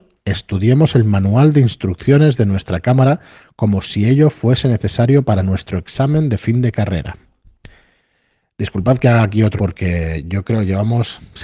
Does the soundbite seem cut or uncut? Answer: cut